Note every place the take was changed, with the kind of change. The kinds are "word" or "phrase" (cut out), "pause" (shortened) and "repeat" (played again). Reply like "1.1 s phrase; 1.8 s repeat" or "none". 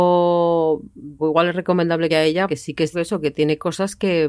1.2 s word; 2.1 s phrase; 2.5 s word; 2.9 s word